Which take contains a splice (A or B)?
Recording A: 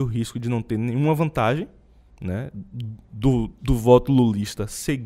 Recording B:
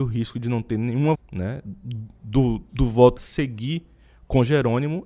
B